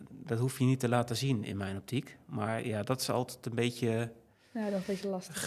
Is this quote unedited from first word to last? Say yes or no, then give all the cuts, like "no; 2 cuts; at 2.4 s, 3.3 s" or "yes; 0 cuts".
yes; 0 cuts